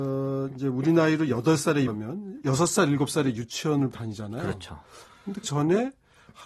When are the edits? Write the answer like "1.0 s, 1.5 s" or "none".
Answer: 1.9 s, 2.4 s, 3.9 s, 5.4 s